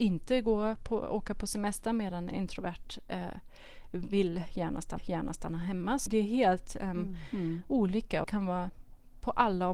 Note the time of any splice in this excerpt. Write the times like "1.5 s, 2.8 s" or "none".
5.0 s, 6.1 s, 8.2 s